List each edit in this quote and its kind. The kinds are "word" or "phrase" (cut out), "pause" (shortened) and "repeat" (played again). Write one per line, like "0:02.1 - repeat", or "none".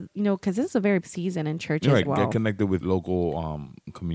0:01.0 - word
0:02.0 - word
0:02.8 - word